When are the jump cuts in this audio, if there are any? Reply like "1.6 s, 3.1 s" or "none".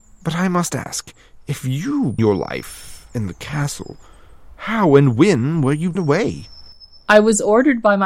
2.2 s, 6.0 s